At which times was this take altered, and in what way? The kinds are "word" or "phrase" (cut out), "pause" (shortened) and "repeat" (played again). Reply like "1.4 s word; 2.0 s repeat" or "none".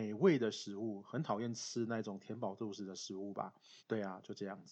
3.8 s pause